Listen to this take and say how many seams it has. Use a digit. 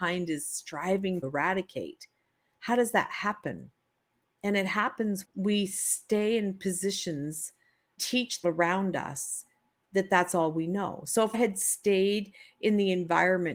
5